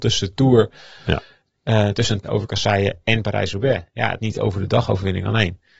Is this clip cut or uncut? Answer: cut